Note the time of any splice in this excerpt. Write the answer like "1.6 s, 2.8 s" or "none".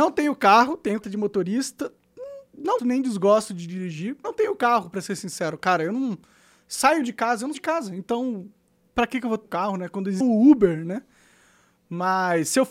1.0 s, 2.8 s, 4.2 s, 7.5 s, 9.4 s, 10.2 s